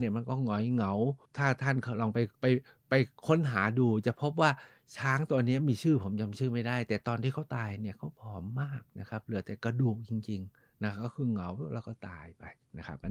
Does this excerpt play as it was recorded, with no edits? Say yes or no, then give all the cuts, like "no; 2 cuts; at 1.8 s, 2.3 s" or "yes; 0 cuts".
no; 2 cuts; at 1.2 s, 2.3 s